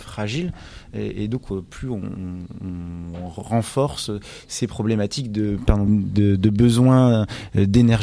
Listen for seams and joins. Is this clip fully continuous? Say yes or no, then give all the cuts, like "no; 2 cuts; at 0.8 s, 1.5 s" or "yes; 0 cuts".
no; 1 cut; at 5.9 s